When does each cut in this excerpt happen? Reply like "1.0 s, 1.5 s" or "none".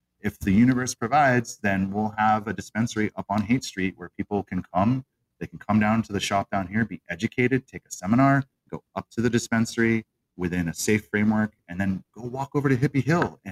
8.7 s